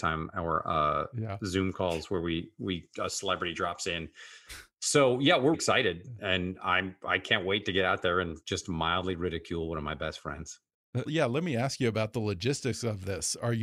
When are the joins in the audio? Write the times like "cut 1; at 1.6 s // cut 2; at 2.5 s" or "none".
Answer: cut 1; at 5.5 s // cut 2; at 8.4 s // cut 3; at 11.1 s